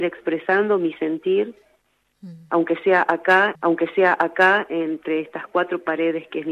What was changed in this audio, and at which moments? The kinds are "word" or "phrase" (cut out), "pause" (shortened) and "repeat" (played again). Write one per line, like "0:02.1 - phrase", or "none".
0:03.5 - repeat